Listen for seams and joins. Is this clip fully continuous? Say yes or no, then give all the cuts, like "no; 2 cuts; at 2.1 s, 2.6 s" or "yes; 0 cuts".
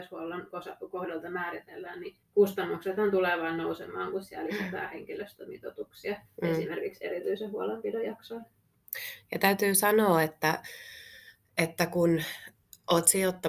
no; 2 cuts; at 2.2 s, 6.3 s